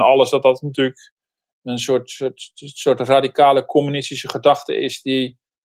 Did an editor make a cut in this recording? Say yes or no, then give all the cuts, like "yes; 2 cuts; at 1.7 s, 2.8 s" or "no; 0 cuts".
no; 0 cuts